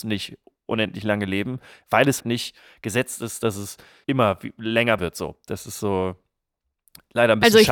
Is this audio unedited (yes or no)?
no